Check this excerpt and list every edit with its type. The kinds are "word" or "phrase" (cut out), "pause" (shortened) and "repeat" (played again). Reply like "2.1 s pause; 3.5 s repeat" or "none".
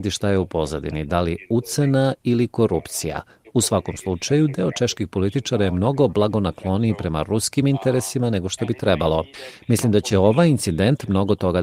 none